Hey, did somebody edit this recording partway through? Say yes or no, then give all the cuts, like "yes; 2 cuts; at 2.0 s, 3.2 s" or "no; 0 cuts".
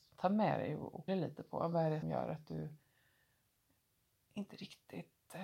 yes; 2 cuts; at 1.1 s, 2.0 s